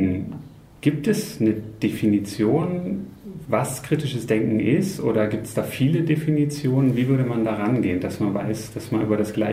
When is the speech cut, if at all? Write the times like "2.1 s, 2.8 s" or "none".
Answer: none